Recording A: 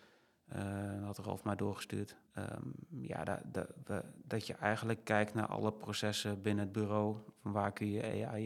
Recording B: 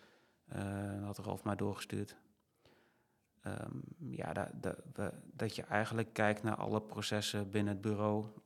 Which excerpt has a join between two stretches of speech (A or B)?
A